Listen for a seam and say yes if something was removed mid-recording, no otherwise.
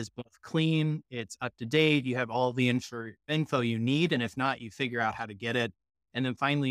no